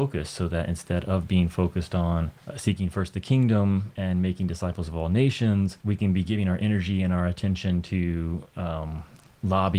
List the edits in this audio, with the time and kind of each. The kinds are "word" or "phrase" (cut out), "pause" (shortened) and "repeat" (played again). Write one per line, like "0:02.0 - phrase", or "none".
0:02.4 - pause
0:05.8 - pause